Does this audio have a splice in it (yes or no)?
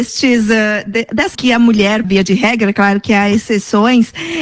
yes